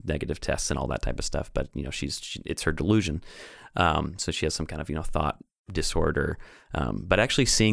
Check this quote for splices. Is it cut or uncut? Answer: uncut